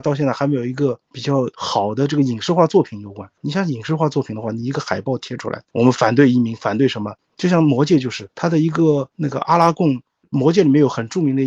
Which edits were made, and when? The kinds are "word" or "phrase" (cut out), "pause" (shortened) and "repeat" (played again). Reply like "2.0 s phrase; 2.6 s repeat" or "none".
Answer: 3.4 s pause